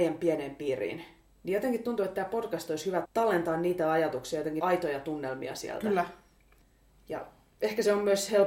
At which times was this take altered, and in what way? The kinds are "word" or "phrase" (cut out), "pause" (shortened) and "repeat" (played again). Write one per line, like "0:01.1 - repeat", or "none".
0:03.0 - word
0:04.6 - word